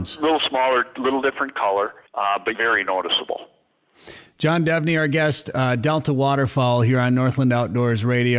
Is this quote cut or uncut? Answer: cut